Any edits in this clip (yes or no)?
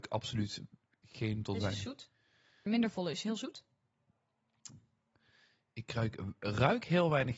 yes